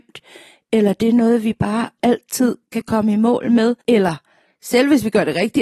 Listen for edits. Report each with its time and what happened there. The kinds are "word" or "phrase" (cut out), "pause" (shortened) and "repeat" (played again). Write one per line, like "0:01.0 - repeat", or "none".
0:03.8 - pause